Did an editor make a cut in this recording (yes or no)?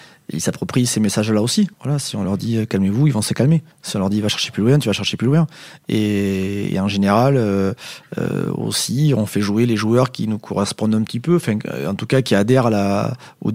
yes